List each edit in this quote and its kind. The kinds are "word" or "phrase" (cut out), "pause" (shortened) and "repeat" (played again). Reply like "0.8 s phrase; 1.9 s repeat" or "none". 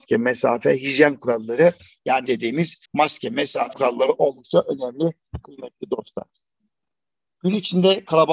2.3 s phrase; 2.9 s pause; 3.7 s word